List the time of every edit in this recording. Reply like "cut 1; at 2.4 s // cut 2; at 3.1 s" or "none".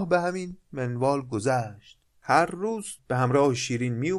cut 1; at 2.0 s // cut 2; at 3.0 s